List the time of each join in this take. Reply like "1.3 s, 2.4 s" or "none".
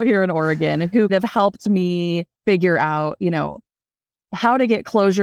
1.1 s, 2.3 s